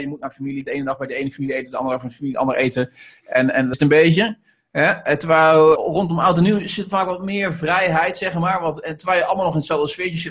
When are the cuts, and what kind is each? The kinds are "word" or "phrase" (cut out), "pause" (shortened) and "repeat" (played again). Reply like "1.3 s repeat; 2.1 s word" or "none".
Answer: 3.7 s word; 5.8 s word